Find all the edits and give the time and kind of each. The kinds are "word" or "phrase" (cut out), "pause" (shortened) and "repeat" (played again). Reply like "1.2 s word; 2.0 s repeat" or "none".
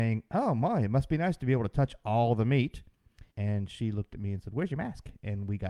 3.3 s pause